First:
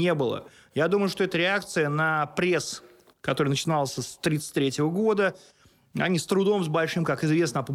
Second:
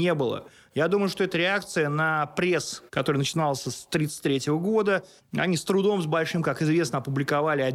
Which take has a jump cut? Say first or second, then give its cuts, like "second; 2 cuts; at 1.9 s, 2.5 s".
second; 2 cuts; at 2.9 s, 5.2 s